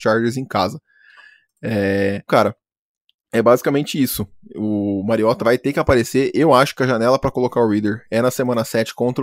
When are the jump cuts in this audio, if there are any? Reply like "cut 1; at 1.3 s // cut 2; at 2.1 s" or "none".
cut 1; at 2.3 s // cut 2; at 5.4 s